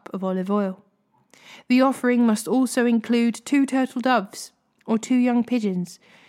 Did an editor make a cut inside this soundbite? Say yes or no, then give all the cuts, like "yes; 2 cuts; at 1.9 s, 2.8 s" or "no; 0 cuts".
no; 0 cuts